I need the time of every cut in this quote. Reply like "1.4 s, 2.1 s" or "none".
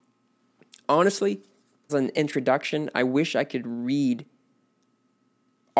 1.9 s